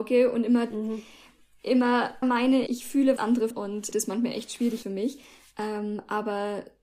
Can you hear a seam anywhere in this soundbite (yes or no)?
yes